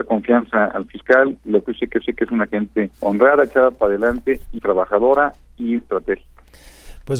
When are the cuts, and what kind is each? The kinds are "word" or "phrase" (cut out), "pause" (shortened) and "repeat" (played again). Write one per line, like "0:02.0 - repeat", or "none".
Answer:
0:01.6 - word
0:02.0 - repeat
0:02.9 - pause
0:04.6 - word
0:05.8 - word

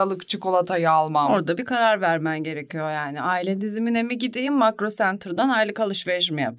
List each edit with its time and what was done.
none

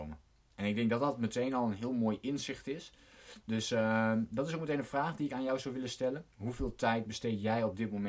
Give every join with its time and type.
0:06.3 - pause

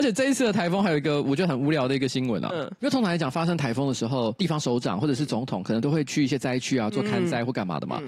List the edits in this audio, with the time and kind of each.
none

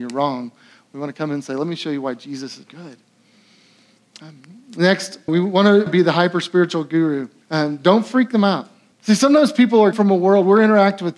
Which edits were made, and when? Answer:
0:02.6 - word
0:05.3 - word
0:05.9 - phrase
0:07.4 - pause
0:08.9 - pause
0:09.9 - word

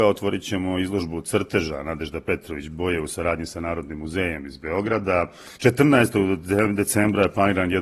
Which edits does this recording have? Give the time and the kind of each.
0:02.7 - word
0:05.6 - pause

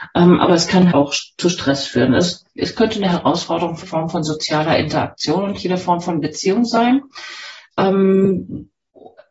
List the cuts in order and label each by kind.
0:00.9 - word
0:03.8 - word

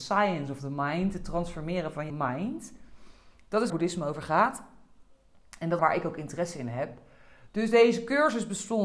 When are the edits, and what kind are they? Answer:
0:02.1 - word
0:03.7 - word
0:05.8 - phrase

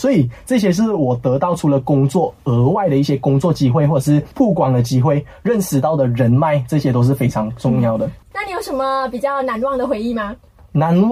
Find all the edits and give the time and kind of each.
0:04.3 - pause

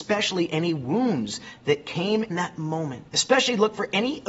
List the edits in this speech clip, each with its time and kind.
0:02.3 - word
0:03.1 - pause

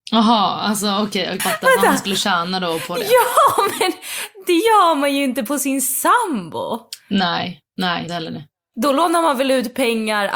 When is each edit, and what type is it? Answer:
0:01.4 - phrase
0:08.1 - phrase

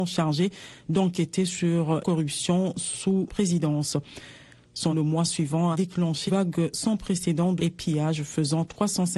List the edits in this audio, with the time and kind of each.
0:02.0 - word
0:03.3 - word
0:04.9 - word
0:05.7 - word
0:06.3 - word
0:07.6 - word

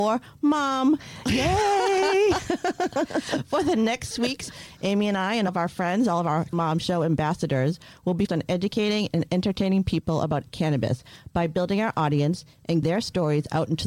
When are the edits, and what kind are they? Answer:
0:04.1 - word
0:05.5 - word
0:06.5 - word
0:08.3 - word
0:12.8 - word

